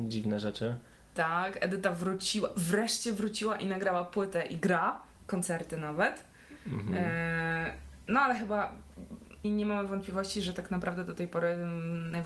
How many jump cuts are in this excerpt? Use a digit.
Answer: 1